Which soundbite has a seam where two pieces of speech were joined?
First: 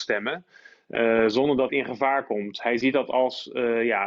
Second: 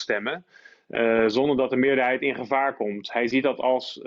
first; 1 cut; at 1.7 s

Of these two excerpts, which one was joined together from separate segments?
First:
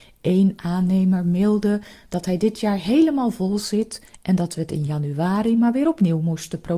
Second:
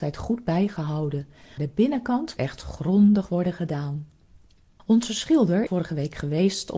second; 3 cuts; at 1.6 s, 2.4 s, 5.7 s

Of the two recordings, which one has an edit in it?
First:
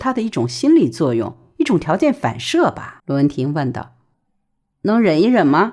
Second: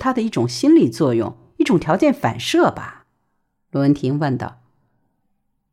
first; 2 cuts; at 3.0 s, 4.1 s

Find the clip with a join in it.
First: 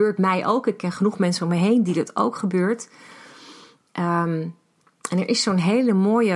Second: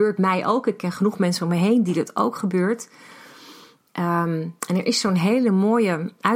second; 1 cut; at 4.6 s

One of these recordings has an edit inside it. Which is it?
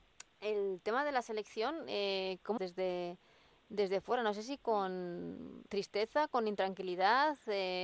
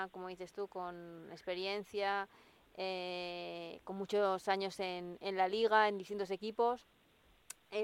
first; 2 cuts; at 2.6 s, 5.7 s

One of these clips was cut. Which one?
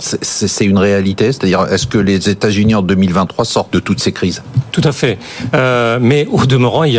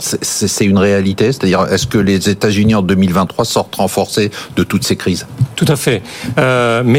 first; 1 cut; at 3.7 s

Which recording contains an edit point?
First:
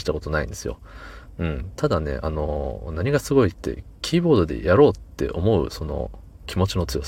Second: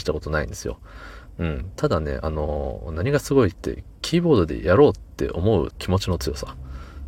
second; 1 cut; at 5.7 s

